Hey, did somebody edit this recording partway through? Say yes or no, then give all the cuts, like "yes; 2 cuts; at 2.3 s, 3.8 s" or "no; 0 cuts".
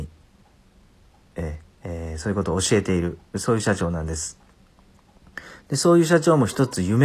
yes; 1 cut; at 3.3 s